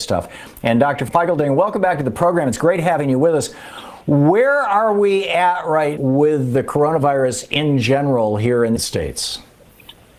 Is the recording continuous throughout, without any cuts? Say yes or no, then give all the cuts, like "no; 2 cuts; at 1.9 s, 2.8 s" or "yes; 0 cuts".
no; 2 cuts; at 6.0 s, 8.8 s